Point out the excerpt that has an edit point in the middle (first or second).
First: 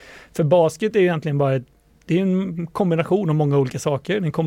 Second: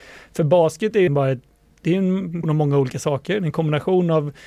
second